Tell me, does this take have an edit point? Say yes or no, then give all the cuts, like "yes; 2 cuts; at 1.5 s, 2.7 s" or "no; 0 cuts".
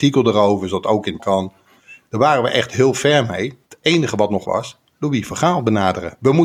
yes; 3 cuts; at 1.2 s, 3.6 s, 4.4 s